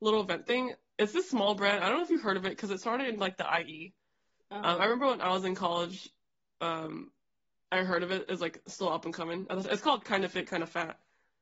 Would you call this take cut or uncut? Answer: uncut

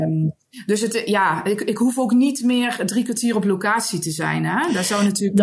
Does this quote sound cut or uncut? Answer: uncut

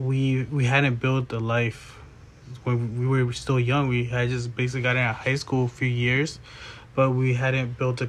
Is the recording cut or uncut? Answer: uncut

